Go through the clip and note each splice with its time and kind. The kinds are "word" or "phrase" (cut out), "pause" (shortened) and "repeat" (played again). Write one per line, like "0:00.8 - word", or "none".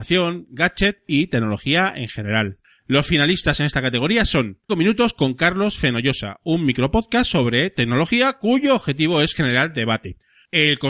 0:04.7 - word

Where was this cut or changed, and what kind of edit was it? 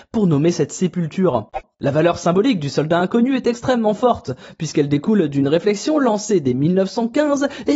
none

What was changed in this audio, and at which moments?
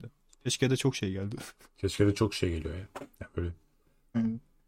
none

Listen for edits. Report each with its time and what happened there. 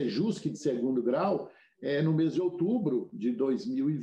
none

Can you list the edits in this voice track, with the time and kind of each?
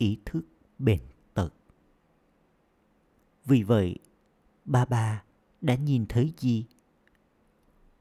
none

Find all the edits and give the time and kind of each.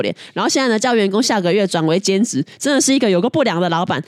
none

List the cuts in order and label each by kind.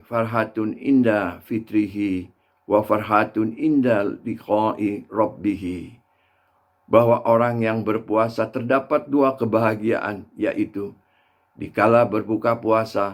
none

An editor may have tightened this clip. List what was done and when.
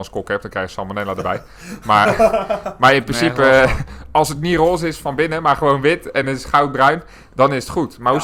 none

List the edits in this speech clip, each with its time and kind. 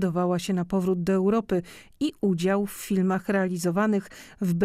none

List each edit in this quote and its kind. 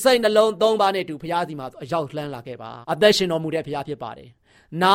0:02.8 - pause

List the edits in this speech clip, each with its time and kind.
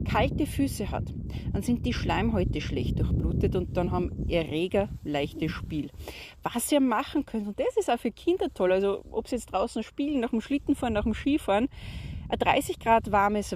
none

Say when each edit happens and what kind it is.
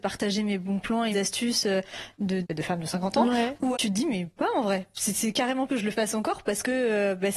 0:01.1 - word
0:02.4 - word
0:03.7 - word
0:04.4 - word
0:05.7 - word

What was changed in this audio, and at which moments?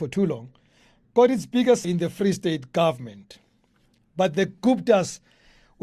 0:01.8 - word

